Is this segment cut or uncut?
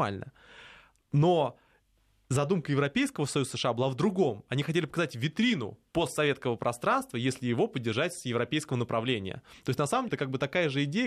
cut